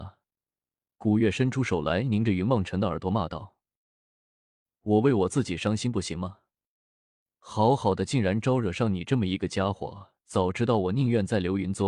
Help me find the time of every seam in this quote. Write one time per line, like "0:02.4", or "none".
0:10.2